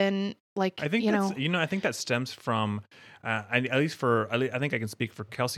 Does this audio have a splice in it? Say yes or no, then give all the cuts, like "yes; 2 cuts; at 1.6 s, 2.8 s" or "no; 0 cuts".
no; 0 cuts